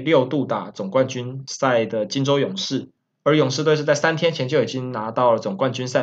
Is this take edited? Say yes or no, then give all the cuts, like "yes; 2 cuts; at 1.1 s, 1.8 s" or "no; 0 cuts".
no; 0 cuts